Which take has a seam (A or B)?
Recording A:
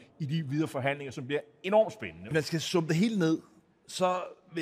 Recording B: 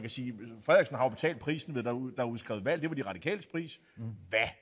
A